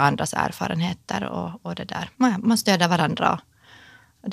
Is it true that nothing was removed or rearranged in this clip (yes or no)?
no